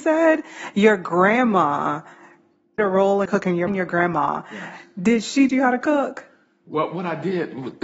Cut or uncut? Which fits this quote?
cut